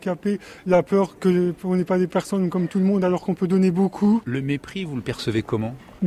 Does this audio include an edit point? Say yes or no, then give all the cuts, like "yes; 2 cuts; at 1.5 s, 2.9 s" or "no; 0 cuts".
no; 0 cuts